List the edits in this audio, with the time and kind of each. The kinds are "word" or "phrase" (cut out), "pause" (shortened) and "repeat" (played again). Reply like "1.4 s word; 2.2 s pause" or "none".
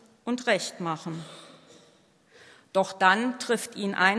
none